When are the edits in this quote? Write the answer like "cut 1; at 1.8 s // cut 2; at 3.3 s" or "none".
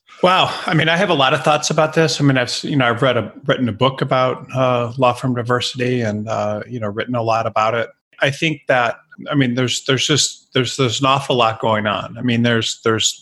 none